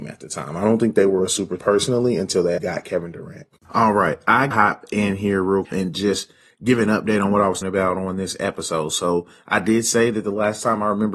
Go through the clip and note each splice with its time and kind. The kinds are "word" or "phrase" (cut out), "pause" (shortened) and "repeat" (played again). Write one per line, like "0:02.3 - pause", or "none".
0:01.6 - word
0:02.6 - word
0:04.5 - word
0:05.6 - word
0:07.6 - word